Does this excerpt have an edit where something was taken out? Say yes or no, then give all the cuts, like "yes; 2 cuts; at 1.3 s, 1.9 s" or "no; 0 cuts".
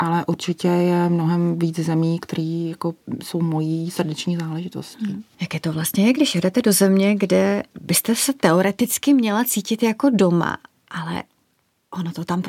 no; 0 cuts